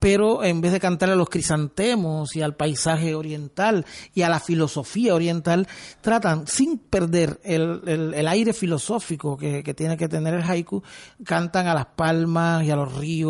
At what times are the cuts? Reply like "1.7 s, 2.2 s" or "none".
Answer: none